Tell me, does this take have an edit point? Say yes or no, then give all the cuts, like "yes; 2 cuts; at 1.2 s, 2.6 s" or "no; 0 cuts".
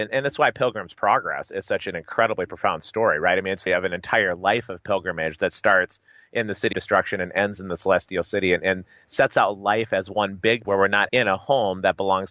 yes; 4 cuts; at 3.7 s, 6.7 s, 10.6 s, 11.1 s